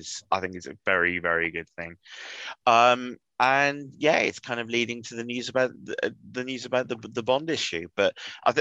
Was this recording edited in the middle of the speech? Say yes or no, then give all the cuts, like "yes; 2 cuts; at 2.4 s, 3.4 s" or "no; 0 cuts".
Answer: no; 0 cuts